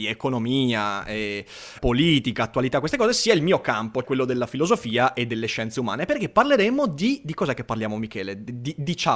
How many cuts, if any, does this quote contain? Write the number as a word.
two